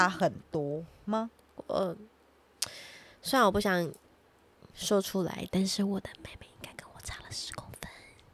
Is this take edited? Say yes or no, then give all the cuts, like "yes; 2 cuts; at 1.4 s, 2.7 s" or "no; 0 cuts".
no; 0 cuts